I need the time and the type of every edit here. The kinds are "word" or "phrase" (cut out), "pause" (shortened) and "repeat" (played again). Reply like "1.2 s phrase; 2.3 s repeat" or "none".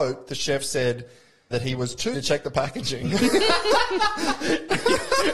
1.5 s word; 2.1 s word